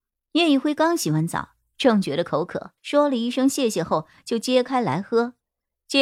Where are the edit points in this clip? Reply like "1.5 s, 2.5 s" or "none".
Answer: 2.8 s